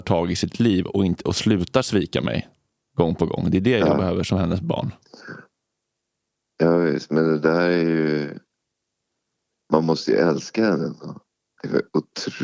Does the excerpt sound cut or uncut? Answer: uncut